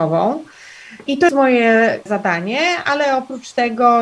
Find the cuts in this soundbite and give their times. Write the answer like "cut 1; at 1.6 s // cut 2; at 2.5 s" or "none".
cut 1; at 1.3 s // cut 2; at 2.1 s